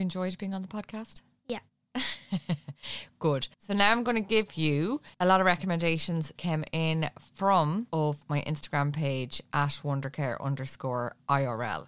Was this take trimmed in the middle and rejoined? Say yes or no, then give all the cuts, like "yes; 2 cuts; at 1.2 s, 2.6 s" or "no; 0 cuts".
yes; 4 cuts; at 3.5 s, 5.1 s, 6.4 s, 7.9 s